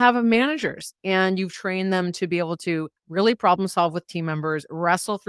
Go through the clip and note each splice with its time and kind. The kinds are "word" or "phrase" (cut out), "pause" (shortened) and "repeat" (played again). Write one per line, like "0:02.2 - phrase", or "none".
0:03.0 - pause